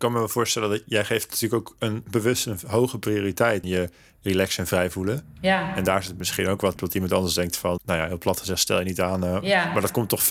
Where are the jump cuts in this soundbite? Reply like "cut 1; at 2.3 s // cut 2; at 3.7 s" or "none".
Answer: cut 1; at 3.6 s // cut 2; at 6.8 s // cut 3; at 7.8 s